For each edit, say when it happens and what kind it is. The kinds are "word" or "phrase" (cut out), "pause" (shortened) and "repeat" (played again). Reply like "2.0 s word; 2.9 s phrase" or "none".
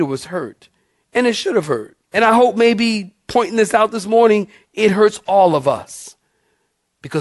2.0 s pause